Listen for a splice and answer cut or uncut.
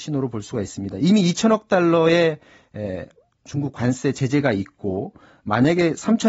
uncut